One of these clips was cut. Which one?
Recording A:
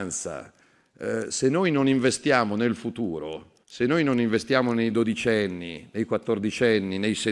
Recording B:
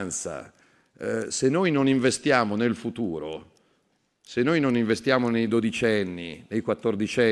A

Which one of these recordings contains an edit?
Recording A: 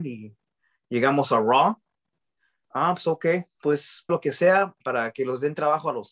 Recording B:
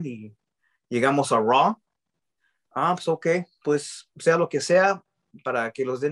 A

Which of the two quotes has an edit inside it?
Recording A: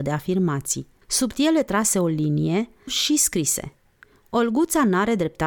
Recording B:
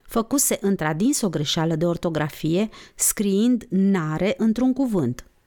A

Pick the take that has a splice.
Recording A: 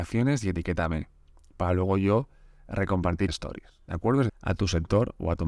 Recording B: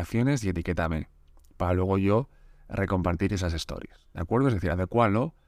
A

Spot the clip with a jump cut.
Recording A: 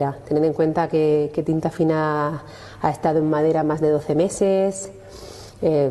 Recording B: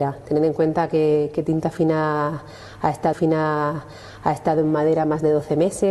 B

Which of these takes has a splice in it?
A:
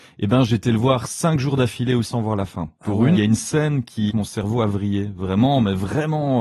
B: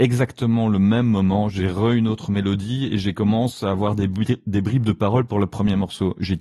A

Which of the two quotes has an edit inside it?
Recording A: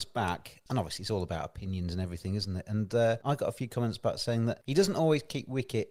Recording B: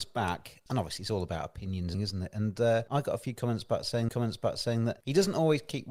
B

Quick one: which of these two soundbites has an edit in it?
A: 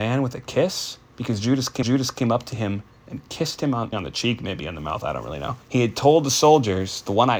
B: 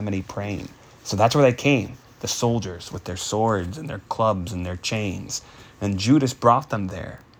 A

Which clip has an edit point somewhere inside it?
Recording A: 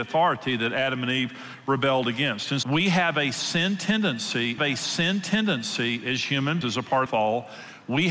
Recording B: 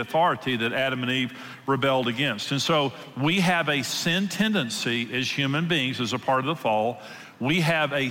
A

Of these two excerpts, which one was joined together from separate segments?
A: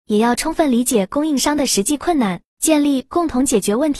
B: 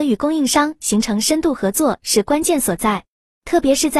A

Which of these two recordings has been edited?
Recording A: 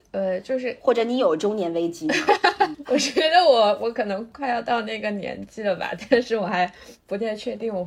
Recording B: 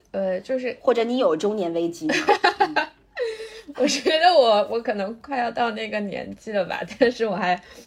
A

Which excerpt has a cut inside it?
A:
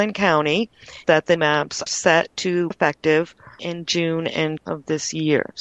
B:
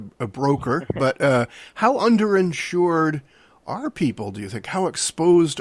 A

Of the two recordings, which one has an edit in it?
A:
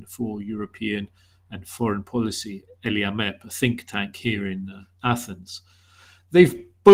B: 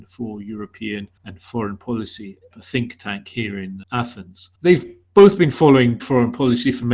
B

